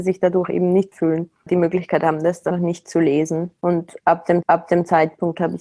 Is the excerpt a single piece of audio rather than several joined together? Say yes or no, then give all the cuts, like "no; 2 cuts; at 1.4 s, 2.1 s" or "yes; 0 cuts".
no; 5 cuts; at 0.9 s, 1.5 s, 2.5 s, 3.6 s, 4.4 s